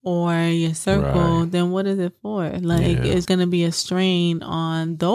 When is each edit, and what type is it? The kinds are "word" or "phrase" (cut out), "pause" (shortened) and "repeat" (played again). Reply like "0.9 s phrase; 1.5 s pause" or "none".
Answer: 3.2 s word

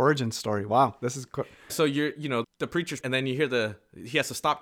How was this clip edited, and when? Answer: 1.7 s word; 2.4 s word; 3.0 s word

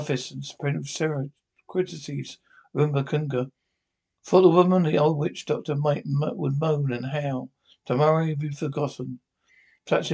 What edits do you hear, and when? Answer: none

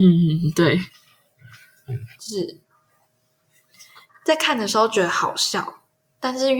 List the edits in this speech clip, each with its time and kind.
none

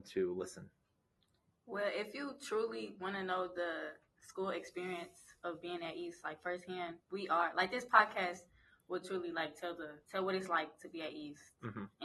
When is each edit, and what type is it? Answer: 7.0 s pause; 10.0 s pause

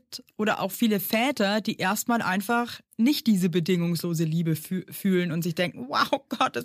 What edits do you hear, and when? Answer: none

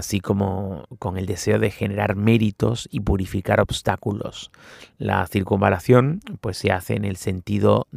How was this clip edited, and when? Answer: none

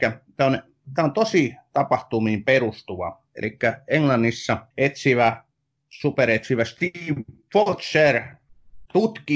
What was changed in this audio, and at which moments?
3.3 s pause; 4.7 s pause

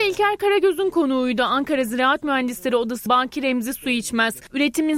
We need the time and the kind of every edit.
3.1 s word

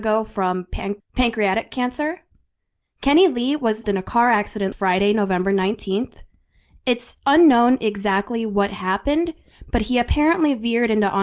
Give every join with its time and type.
1.0 s word; 3.8 s word; 4.7 s word

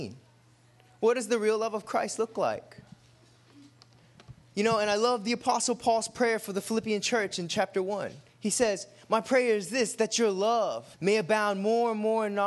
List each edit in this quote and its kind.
8.3 s pause; 10.9 s pause

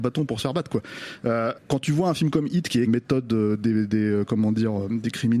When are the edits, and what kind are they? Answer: 1.5 s word; 2.8 s phrase

